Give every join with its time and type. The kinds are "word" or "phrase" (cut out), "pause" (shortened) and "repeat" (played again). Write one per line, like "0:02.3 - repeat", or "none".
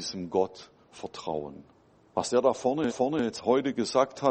0:01.7 - pause
0:02.9 - repeat